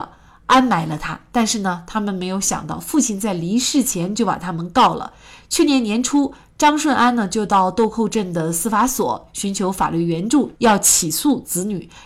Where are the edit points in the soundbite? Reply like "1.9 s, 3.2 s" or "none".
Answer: none